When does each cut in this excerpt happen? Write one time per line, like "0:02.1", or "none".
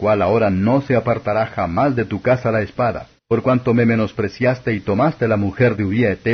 0:03.2